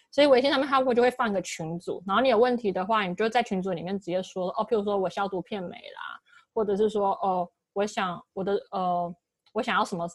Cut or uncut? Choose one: uncut